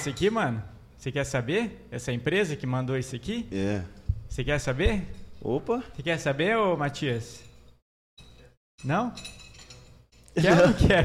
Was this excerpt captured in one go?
yes; 0 cuts

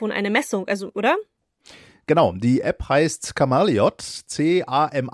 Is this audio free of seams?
no; 1 cut; at 0.9 s

